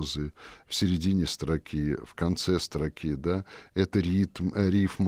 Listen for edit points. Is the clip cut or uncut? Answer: uncut